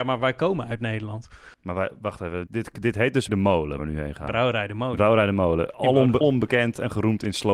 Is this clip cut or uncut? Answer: cut